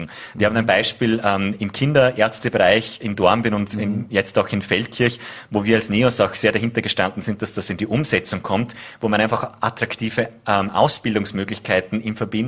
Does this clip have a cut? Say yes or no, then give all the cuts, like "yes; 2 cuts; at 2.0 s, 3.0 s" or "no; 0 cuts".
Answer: no; 0 cuts